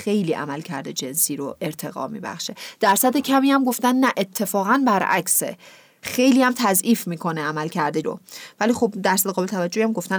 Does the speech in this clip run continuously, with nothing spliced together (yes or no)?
no